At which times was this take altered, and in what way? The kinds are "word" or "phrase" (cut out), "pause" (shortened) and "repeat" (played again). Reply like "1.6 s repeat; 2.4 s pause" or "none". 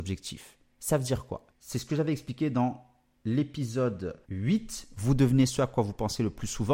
4.2 s pause

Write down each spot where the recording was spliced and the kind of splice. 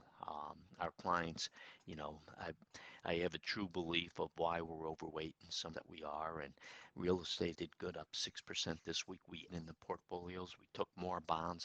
5.7 s word; 7.5 s word; 9.5 s phrase

